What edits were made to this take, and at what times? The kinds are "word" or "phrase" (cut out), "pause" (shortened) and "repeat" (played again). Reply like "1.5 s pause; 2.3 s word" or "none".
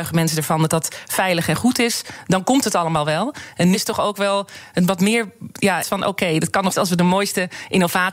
3.7 s word; 5.8 s word; 6.7 s word